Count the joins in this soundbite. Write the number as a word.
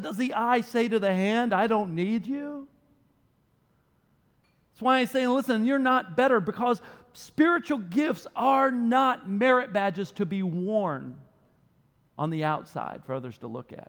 zero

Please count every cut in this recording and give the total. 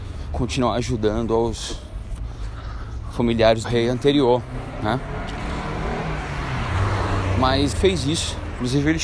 two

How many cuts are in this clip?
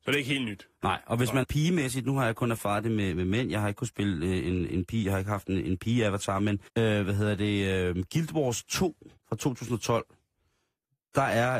four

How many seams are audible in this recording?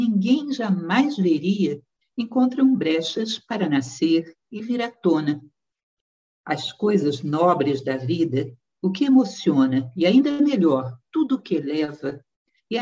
zero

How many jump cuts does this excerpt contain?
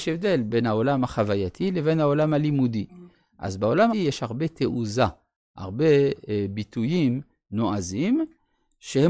one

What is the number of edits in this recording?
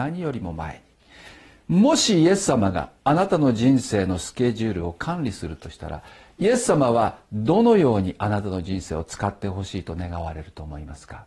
zero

